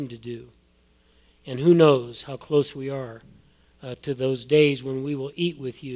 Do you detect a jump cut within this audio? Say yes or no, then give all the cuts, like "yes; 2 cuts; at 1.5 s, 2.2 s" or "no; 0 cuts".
no; 0 cuts